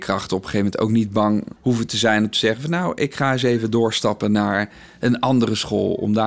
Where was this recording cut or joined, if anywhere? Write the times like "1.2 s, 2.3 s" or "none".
1.6 s